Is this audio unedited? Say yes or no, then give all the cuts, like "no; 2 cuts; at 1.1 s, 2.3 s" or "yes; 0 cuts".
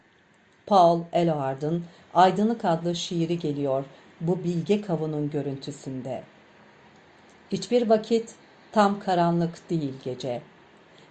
yes; 0 cuts